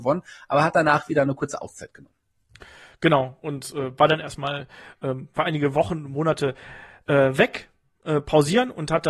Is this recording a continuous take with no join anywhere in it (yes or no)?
yes